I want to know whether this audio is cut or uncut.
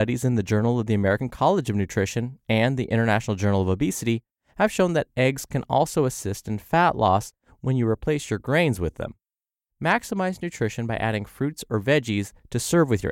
uncut